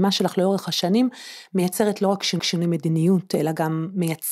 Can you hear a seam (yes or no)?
yes